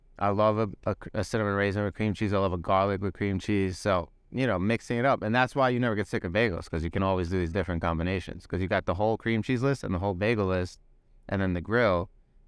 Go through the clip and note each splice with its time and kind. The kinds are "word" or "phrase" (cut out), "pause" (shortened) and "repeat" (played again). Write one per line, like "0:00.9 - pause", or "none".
none